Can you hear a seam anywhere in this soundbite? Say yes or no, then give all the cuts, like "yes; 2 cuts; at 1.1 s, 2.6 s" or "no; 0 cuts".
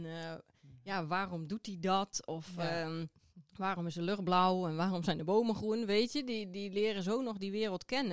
no; 0 cuts